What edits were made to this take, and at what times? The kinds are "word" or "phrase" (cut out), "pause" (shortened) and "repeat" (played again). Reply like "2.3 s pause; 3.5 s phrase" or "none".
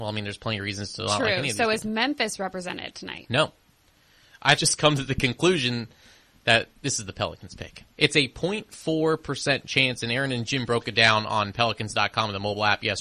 4.6 s phrase; 6.8 s pause